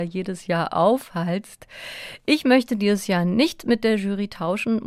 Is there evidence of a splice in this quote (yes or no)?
no